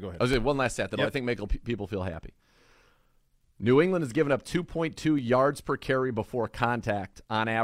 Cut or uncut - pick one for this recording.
uncut